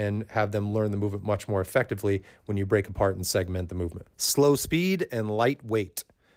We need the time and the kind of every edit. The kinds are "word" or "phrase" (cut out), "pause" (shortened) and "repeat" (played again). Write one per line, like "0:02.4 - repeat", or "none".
0:04.1 - pause